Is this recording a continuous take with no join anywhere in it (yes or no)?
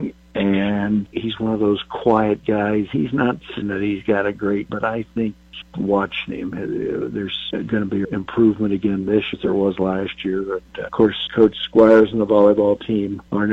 no